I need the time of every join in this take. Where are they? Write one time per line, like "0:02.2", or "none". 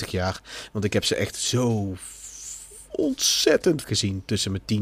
0:03.8